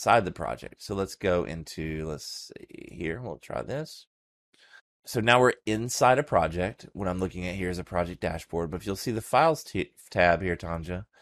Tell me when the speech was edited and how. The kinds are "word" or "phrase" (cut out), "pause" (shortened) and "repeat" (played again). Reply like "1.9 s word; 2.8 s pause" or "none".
4.8 s pause